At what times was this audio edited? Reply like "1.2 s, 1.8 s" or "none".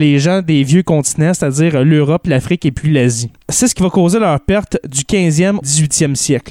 3.4 s, 5.6 s

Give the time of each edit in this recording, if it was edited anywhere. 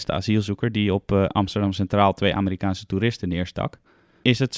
none

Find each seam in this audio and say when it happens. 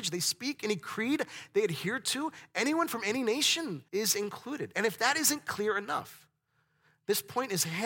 3.9 s

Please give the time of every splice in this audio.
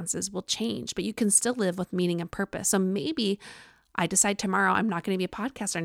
none

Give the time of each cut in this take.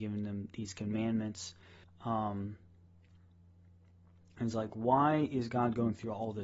1.8 s

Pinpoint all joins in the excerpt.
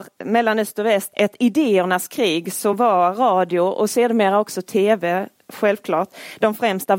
none

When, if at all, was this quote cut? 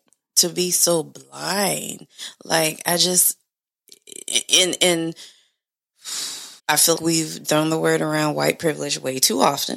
6.6 s, 7.0 s, 7.4 s

